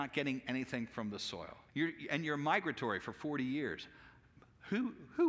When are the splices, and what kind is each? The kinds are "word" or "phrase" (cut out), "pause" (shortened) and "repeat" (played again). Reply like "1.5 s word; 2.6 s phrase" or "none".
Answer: 1.7 s pause